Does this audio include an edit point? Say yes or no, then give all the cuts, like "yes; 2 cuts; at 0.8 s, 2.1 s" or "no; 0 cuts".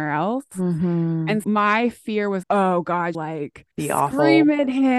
yes; 4 cuts; at 1.4 s, 2.4 s, 3.1 s, 3.7 s